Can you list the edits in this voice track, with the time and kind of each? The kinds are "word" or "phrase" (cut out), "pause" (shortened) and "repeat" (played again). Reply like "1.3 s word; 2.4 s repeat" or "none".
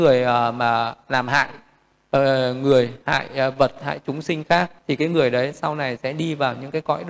3.0 s pause; 4.8 s pause